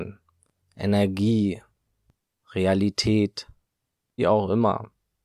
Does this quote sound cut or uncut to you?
cut